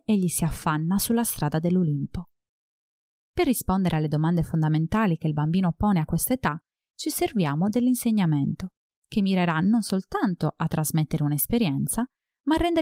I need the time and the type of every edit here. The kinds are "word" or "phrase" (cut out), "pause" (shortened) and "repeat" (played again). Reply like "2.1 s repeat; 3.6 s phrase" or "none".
none